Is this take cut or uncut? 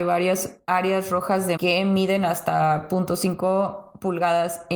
cut